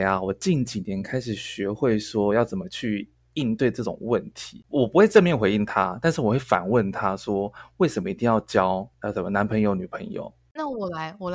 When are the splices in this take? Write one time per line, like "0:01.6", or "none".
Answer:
none